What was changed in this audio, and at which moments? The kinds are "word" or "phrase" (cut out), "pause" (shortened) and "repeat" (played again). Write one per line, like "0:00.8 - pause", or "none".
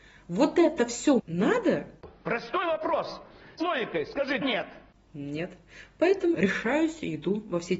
0:01.2 - word
0:03.6 - word
0:04.4 - word
0:06.3 - word